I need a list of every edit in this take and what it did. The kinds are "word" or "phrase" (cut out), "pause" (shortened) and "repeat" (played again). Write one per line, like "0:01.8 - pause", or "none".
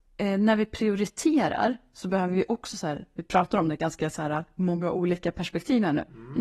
none